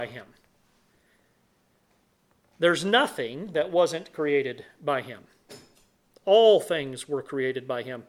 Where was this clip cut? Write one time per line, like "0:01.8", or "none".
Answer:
none